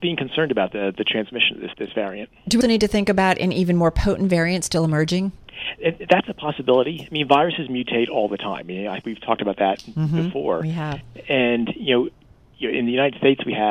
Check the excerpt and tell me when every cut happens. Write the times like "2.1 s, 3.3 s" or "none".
1.7 s, 2.6 s, 9.0 s

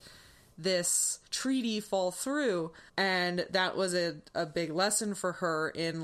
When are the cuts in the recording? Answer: 1.3 s, 2.9 s

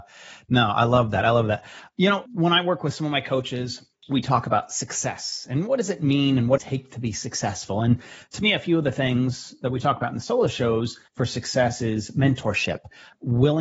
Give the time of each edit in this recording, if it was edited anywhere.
2.3 s, 6.6 s

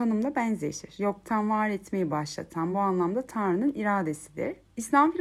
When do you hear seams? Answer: none

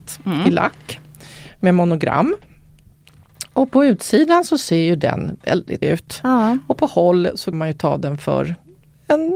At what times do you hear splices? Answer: 5.8 s, 7.5 s

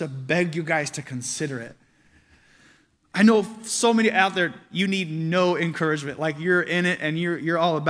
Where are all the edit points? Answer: none

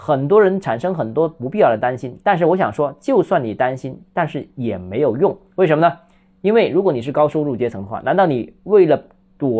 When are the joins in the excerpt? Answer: none

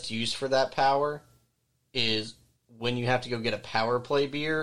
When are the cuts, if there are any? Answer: none

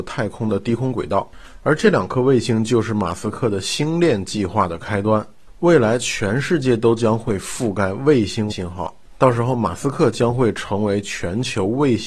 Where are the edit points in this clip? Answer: 8.5 s

